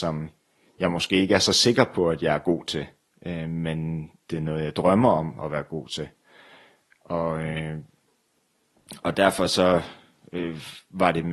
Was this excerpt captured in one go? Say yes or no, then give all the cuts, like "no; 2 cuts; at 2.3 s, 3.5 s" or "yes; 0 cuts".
yes; 0 cuts